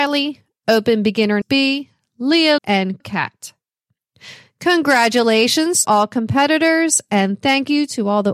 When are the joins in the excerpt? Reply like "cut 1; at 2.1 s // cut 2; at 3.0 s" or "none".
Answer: cut 1; at 1.4 s // cut 2; at 2.6 s // cut 3; at 3.0 s // cut 4; at 5.8 s

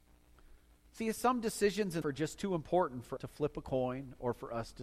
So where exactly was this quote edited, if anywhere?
cut 1; at 2.0 s // cut 2; at 3.2 s

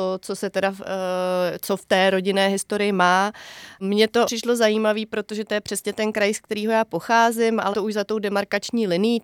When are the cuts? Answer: cut 1; at 4.3 s // cut 2; at 7.7 s

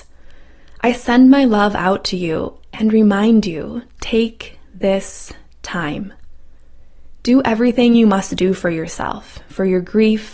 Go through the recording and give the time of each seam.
none

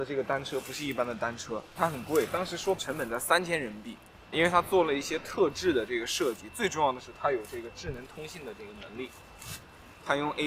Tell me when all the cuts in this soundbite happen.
cut 1; at 1.8 s // cut 2; at 2.8 s // cut 3; at 4.3 s

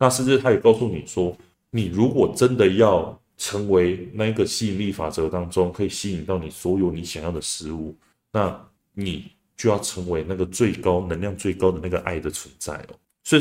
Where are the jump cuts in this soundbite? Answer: none

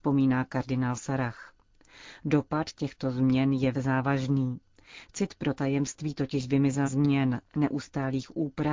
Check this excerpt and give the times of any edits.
cut 1; at 3.7 s // cut 2; at 6.9 s

